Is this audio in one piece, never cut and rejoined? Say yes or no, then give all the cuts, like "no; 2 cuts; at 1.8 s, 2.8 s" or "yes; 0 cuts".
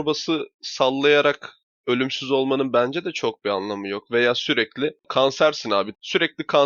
yes; 0 cuts